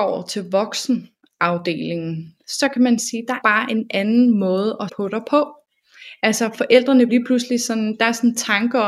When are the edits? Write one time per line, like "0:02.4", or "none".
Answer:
0:03.4
0:04.9
0:07.1